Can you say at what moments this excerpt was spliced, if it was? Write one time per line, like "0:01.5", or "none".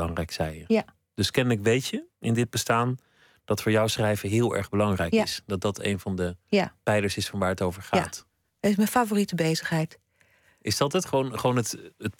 none